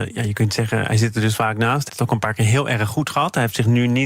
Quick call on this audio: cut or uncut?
cut